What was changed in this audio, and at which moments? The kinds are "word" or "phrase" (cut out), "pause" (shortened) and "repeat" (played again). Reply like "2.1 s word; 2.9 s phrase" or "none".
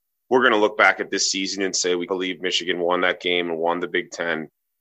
2.1 s word